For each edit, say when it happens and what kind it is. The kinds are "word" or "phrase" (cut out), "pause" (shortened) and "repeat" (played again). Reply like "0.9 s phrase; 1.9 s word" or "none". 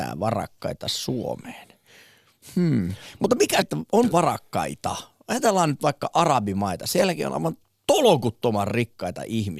3.6 s word; 4.1 s word; 7.6 s pause